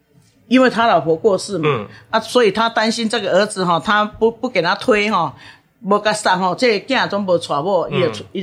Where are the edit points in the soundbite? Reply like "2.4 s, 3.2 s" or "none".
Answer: none

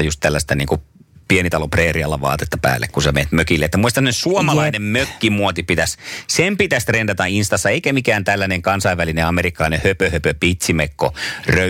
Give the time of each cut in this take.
none

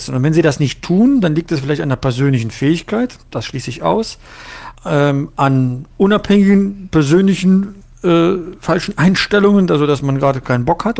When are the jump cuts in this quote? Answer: 3.2 s, 4.7 s, 5.9 s

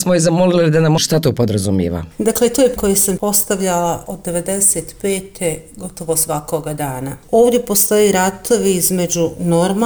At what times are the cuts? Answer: 1.0 s, 2.8 s, 3.2 s

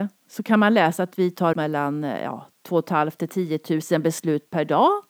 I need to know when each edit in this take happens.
1.5 s, 2.5 s

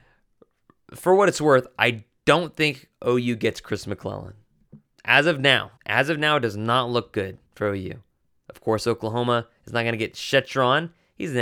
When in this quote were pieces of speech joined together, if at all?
5.8 s, 7.5 s

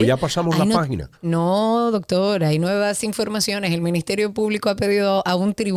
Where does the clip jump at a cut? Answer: 1.2 s

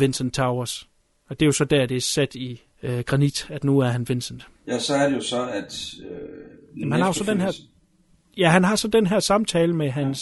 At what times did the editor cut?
4.6 s

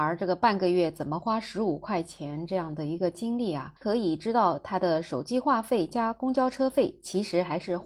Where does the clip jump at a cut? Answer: 3.8 s

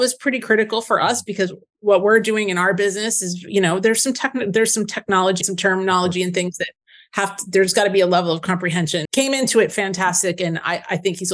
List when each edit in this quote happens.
5.4 s, 9.0 s

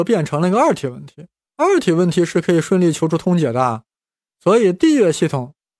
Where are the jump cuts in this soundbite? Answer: 1.4 s

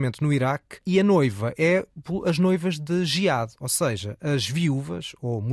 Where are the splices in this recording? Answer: none

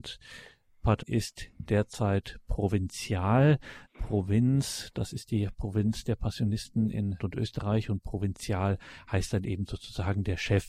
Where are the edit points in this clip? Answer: 1.0 s, 3.9 s, 7.2 s

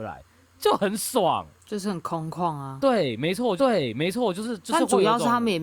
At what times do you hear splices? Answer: 1.6 s, 3.6 s

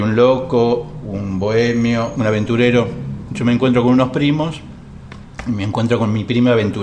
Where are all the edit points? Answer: 2.1 s

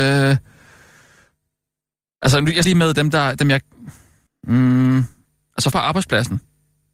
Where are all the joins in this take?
2.6 s, 4.3 s, 5.7 s

